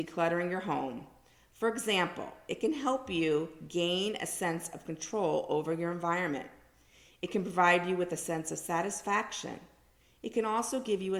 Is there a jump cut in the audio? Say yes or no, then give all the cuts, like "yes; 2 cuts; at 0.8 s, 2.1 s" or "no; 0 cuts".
no; 0 cuts